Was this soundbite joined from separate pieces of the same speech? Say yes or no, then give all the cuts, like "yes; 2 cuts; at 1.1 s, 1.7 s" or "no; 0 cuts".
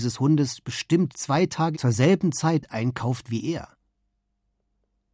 yes; 2 cuts; at 1.1 s, 1.7 s